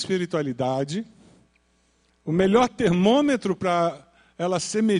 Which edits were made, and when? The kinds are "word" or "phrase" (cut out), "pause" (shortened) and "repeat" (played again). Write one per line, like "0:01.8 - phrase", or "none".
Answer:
none